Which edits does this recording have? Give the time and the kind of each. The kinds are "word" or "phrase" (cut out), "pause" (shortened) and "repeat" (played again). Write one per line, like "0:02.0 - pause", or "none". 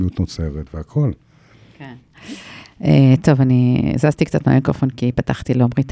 none